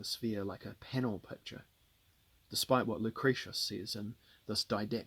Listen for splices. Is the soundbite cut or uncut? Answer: uncut